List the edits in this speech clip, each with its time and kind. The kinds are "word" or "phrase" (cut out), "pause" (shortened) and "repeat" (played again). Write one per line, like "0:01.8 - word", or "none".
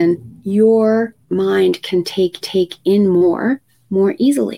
0:01.2 - pause
0:02.4 - repeat